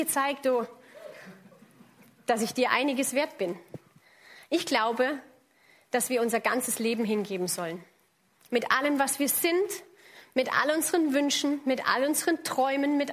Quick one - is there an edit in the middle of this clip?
no; 0 cuts

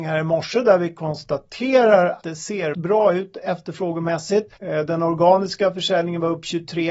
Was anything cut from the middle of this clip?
yes; 3 cuts; at 2.2 s, 2.7 s, 4.6 s

